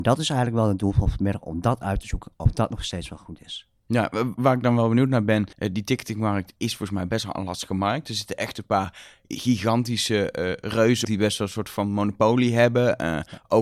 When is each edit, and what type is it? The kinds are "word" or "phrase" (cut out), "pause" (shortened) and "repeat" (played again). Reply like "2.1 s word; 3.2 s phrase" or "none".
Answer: 4.3 s word; 5.5 s pause; 11.0 s word